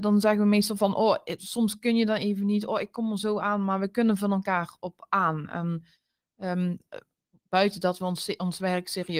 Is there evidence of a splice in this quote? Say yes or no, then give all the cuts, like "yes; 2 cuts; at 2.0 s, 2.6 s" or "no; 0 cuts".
no; 0 cuts